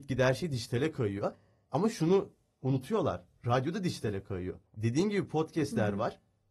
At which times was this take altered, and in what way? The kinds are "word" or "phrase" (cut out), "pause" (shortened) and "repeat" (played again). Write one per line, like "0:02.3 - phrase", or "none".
0:04.7 - pause